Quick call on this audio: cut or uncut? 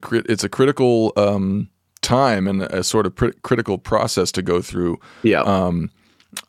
uncut